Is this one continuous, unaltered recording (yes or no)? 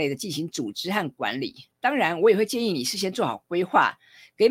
no